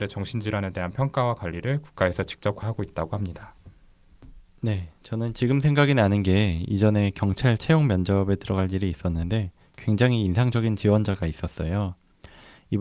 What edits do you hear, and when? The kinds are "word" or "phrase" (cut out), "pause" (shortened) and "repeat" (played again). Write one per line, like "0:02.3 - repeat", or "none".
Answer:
none